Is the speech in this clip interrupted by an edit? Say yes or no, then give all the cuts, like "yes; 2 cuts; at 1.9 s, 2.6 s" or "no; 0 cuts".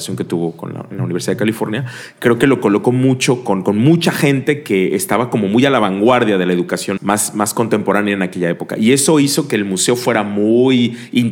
yes; 1 cut; at 7.0 s